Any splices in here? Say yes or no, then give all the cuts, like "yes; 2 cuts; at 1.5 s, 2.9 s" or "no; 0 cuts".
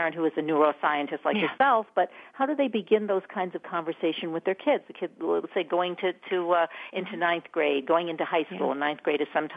no; 0 cuts